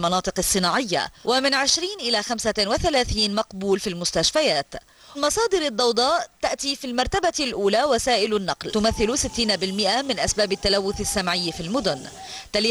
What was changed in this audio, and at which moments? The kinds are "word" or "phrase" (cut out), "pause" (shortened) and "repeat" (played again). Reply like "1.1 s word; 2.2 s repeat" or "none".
1.2 s pause; 5.1 s word; 8.7 s word